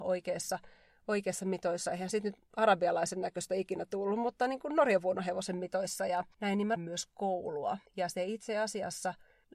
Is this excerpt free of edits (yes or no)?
no